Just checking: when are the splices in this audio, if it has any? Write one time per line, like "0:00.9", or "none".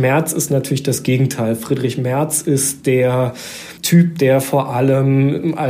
0:03.8